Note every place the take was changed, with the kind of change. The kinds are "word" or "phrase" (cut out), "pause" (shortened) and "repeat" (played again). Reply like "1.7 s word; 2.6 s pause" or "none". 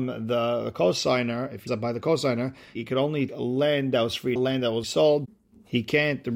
1.7 s word; 2.8 s word; 3.3 s word; 4.4 s word; 4.8 s word